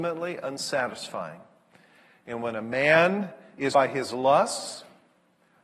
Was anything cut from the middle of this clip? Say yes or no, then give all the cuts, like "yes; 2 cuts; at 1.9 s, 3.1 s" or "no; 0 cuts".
yes; 1 cut; at 3.7 s